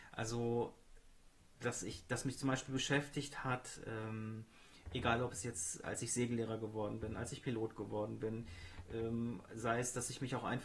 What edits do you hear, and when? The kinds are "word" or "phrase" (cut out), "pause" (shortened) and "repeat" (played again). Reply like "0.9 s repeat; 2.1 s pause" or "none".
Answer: none